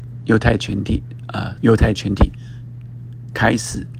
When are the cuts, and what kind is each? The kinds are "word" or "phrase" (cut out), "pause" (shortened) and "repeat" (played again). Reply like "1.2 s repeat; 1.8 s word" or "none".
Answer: 1.6 s phrase